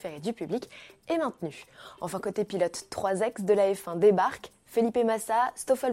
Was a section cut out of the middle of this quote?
no; 0 cuts

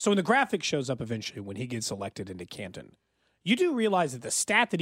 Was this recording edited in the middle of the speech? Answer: no; 0 cuts

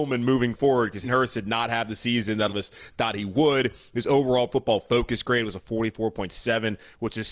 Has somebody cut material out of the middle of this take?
yes; 3 cuts; at 1.0 s, 2.5 s, 4.5 s

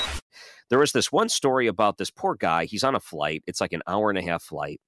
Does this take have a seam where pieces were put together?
no; 0 cuts

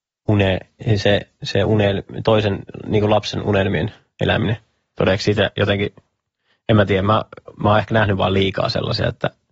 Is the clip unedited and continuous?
yes; 0 cuts

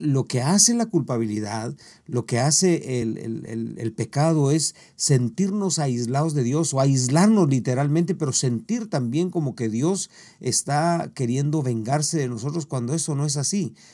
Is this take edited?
no; 0 cuts

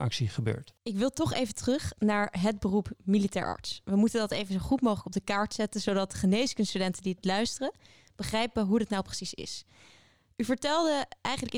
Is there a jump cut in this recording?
no; 0 cuts

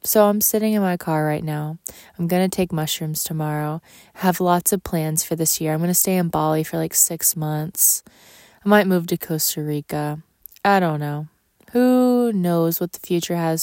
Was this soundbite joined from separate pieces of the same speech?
no; 0 cuts

